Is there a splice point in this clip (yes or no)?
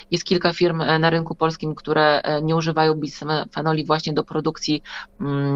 no